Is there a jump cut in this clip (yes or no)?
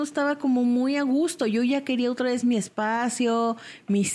no